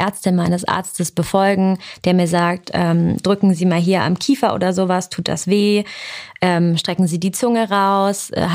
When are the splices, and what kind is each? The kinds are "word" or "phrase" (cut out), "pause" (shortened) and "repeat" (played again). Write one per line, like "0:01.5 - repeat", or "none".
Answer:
none